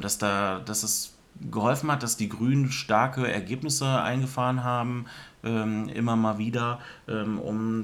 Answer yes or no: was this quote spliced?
no